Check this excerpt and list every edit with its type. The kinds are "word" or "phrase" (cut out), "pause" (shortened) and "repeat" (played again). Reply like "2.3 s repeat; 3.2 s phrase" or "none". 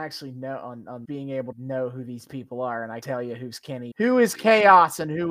1.0 s word; 1.5 s word; 3.0 s word; 3.9 s word

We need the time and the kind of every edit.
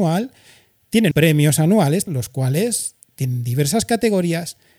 1.1 s word; 2.1 s word

